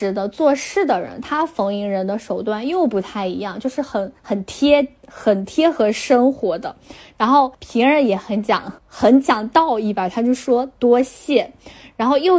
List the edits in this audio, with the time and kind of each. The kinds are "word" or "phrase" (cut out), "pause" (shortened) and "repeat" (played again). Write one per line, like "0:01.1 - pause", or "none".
0:04.2 - pause
0:07.5 - pause
0:08.8 - pause